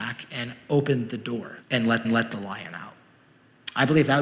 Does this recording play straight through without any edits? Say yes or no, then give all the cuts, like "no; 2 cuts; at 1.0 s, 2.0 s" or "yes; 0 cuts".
no; 2 cuts; at 1.6 s, 2.0 s